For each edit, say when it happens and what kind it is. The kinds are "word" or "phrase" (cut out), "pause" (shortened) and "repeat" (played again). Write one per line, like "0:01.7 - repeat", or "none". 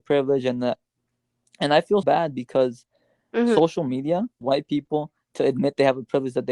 0:02.0 - word
0:04.4 - word